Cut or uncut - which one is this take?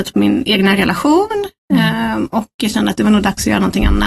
uncut